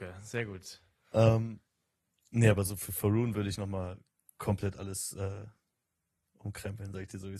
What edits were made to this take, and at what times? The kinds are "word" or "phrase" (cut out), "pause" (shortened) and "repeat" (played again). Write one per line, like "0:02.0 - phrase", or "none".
none